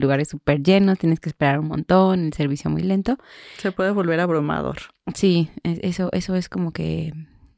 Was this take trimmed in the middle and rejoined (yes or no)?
no